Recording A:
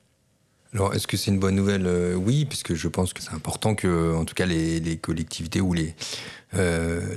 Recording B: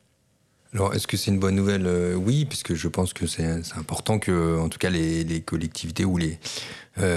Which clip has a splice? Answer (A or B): A